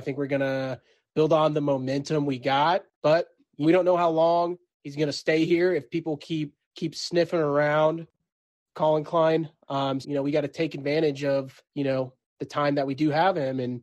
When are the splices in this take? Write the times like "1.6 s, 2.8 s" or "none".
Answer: 2.9 s, 3.6 s, 6.6 s, 10.0 s, 11.6 s